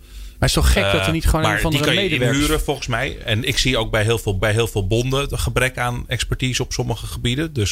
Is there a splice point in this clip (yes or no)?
yes